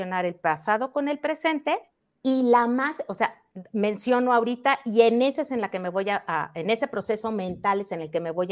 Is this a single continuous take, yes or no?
yes